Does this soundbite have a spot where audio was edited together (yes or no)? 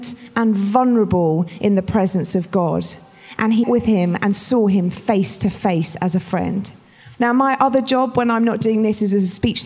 yes